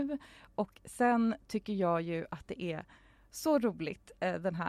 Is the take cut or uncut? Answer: uncut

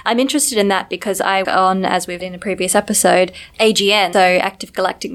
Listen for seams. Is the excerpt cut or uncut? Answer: cut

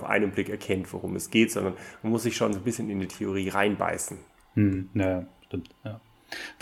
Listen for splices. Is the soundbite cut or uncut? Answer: uncut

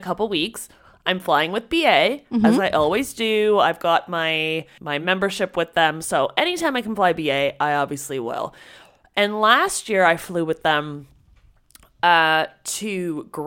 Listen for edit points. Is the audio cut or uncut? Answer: uncut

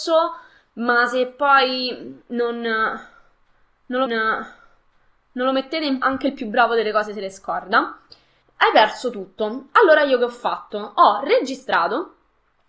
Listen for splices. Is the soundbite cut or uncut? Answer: cut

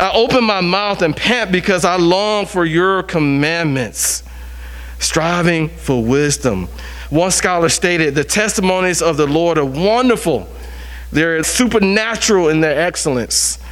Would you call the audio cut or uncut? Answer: cut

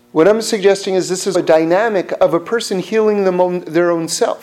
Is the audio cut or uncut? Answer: cut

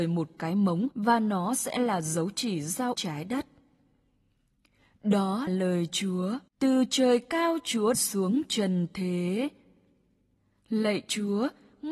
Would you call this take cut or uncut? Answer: cut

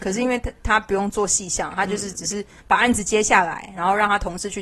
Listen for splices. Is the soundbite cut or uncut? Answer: uncut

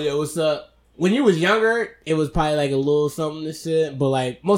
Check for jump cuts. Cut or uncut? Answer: uncut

